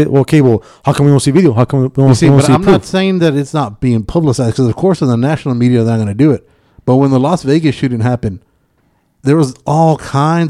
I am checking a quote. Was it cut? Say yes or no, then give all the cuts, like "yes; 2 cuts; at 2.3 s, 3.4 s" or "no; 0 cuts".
no; 0 cuts